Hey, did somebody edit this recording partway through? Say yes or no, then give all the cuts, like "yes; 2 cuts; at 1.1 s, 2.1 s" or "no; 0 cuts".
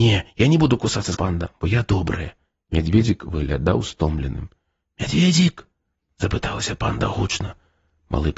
yes; 1 cut; at 1.1 s